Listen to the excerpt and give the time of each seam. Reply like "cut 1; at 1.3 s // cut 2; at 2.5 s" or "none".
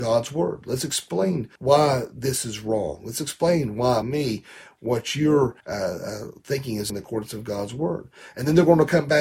cut 1; at 1.6 s // cut 2; at 4.0 s // cut 3; at 5.6 s // cut 4; at 6.9 s